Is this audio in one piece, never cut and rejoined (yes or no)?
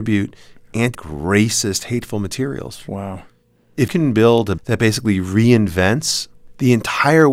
no